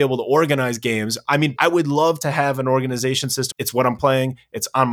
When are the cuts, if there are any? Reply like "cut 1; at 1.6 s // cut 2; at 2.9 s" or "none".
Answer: cut 1; at 1.6 s // cut 2; at 3.5 s // cut 3; at 4.0 s